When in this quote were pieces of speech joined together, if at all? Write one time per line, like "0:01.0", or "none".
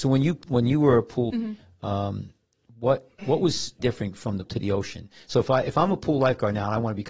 0:01.3
0:03.2
0:03.8
0:04.5